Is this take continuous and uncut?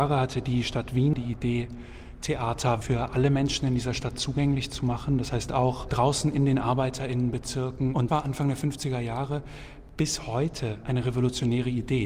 no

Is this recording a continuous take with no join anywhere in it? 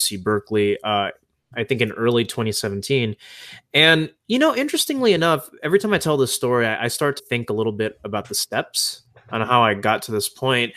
no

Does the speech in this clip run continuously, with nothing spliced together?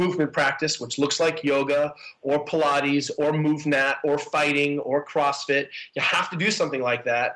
yes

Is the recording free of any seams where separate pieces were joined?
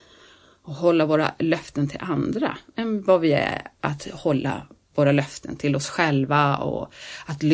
yes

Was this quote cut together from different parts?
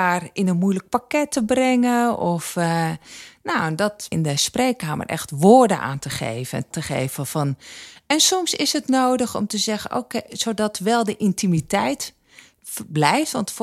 yes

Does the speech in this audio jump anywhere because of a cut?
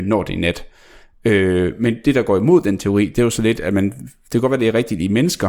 no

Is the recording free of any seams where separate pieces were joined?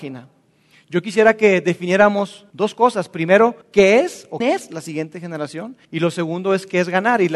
no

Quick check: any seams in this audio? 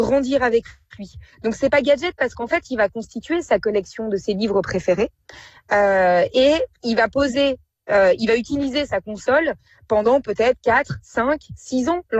no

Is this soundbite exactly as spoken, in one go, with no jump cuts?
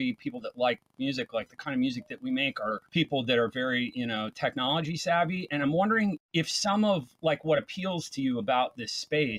no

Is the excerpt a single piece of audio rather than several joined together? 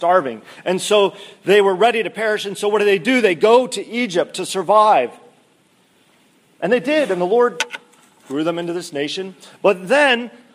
yes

